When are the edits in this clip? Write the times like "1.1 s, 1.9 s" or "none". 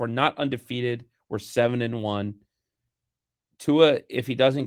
none